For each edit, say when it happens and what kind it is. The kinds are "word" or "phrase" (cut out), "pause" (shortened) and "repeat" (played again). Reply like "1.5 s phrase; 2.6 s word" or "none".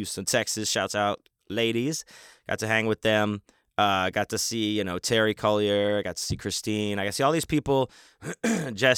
none

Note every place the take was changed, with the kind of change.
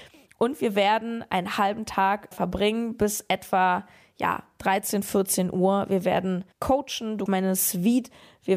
2.3 s word; 6.5 s pause; 7.3 s phrase

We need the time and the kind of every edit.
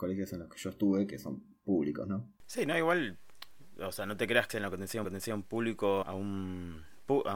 2.4 s pause; 4.5 s phrase; 5.0 s repeat; 6.0 s word

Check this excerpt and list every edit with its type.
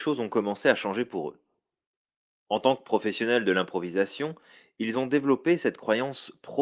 none

